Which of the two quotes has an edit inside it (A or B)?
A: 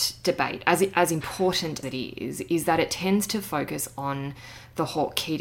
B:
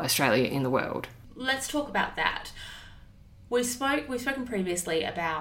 A